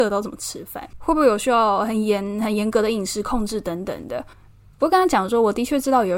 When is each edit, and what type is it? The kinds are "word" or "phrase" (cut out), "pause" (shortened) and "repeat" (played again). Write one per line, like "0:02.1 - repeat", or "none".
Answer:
0:00.9 - pause
0:04.3 - pause